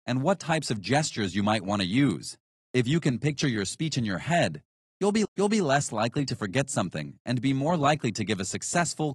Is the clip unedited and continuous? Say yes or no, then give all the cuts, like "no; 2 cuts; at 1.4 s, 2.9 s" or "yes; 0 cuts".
no; 2 cuts; at 2.5 s, 5.2 s